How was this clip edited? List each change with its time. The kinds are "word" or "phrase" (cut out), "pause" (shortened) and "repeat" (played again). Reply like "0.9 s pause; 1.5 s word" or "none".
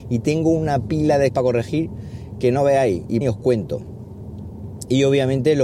1.3 s word; 3.2 s phrase